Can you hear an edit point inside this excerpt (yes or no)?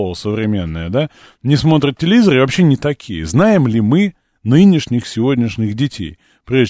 no